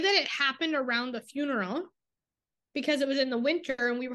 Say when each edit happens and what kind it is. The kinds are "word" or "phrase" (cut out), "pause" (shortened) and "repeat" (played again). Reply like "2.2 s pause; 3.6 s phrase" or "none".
none